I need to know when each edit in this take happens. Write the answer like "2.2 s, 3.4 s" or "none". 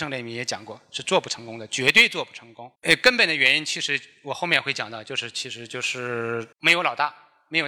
2.8 s, 6.5 s